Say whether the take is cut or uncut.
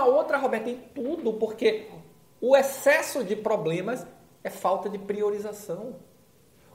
uncut